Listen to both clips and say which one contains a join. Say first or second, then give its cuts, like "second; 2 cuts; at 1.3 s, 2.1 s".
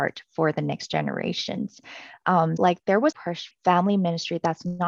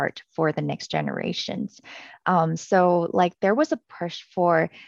first; 3 cuts; at 2.6 s, 3.1 s, 3.5 s